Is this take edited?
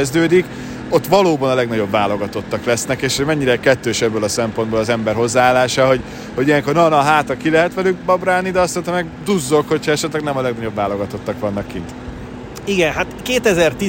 no; 0 cuts

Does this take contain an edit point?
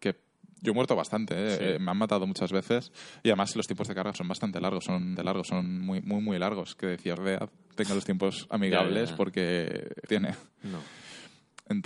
yes; 4 cuts; at 4.1 s, 5.2 s, 7.2 s, 10.1 s

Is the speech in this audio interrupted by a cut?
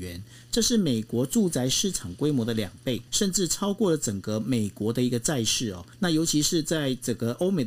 yes; 2 cuts; at 3.1 s, 5.9 s

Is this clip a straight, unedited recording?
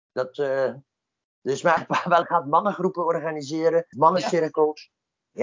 no; 3 cuts; at 1.8 s, 2.2 s, 3.9 s

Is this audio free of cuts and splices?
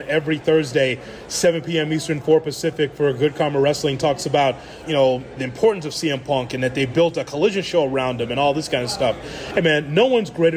no; 2 cuts; at 4.8 s, 5.4 s

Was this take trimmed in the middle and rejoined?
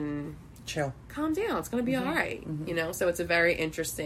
no; 0 cuts

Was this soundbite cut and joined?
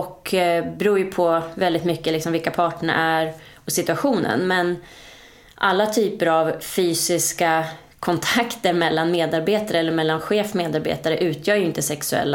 no; 0 cuts

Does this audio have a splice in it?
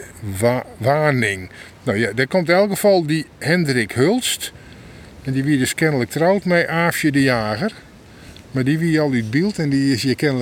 no; 0 cuts

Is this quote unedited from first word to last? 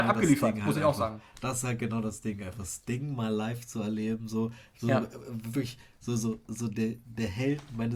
yes; 0 cuts

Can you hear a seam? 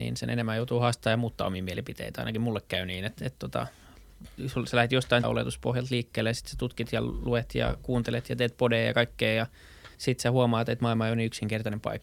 yes; 2 cuts; at 5.2 s, 9.9 s

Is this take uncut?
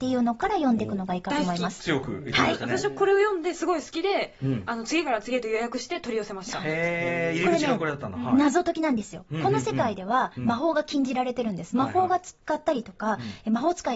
no; 1 cut; at 12.4 s

